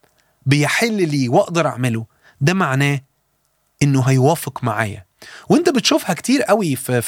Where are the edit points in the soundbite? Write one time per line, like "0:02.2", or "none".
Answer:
none